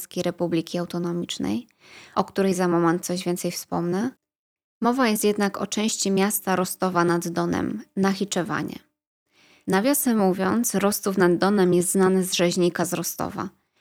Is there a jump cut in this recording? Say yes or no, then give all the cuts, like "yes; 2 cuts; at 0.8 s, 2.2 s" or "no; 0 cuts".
no; 0 cuts